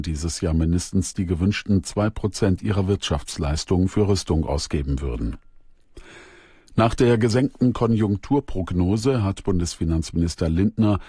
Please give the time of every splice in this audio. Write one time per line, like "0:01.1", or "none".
none